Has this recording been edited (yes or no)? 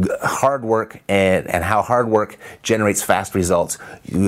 no